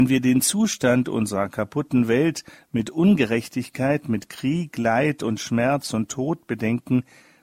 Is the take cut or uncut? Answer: uncut